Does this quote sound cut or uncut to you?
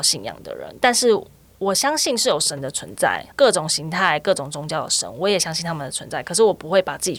cut